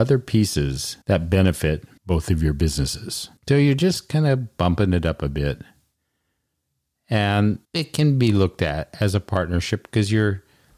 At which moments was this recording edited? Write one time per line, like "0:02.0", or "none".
0:01.0
0:02.0
0:03.4
0:07.6